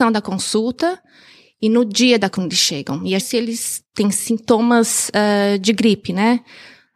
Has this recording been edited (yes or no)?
yes